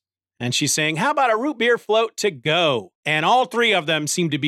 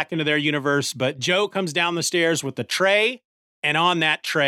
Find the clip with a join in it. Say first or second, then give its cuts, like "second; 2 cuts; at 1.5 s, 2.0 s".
first; 1 cut; at 3.0 s